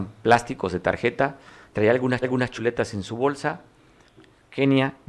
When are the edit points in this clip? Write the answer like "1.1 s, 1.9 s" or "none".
1.7 s, 2.2 s